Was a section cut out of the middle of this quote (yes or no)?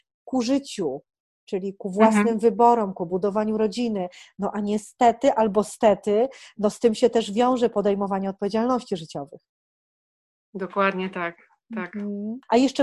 no